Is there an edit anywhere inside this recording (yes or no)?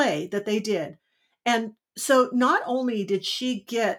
no